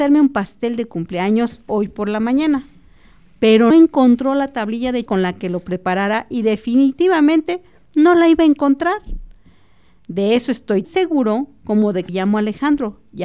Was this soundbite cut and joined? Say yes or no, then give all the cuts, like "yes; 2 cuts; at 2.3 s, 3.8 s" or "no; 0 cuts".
yes; 4 cuts; at 3.7 s, 5.1 s, 10.8 s, 12.1 s